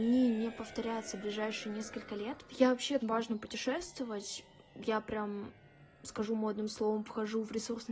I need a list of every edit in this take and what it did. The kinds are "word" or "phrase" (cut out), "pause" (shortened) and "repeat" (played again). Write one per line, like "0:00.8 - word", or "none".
0:03.0 - phrase
0:04.7 - pause